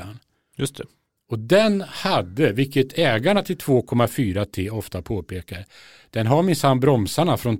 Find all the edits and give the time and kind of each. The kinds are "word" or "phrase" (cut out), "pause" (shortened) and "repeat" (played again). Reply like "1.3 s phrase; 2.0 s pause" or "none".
none